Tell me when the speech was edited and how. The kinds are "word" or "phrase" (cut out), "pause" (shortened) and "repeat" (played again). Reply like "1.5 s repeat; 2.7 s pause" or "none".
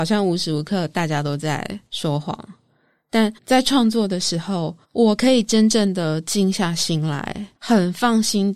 1.9 s pause; 3.4 s pause; 4.8 s pause; 7.6 s pause